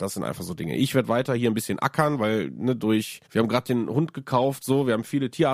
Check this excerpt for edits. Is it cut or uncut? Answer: cut